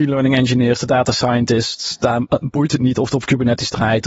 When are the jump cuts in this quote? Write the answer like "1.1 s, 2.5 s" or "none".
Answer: none